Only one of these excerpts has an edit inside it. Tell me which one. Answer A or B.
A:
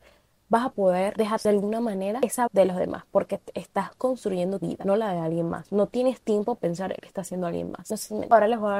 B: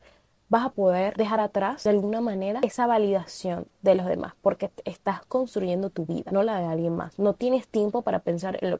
A